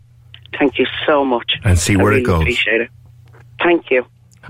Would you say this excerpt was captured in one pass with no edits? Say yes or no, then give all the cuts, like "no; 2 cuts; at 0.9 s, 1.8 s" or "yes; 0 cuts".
yes; 0 cuts